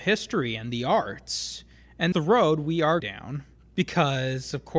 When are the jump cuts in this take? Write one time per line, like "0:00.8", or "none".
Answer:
0:02.1
0:03.0